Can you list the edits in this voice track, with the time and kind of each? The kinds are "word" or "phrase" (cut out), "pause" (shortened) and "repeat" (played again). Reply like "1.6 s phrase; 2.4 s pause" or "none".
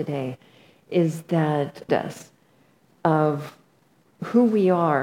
1.9 s phrase